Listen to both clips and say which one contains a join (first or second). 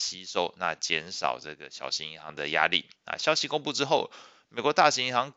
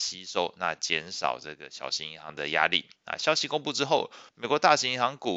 second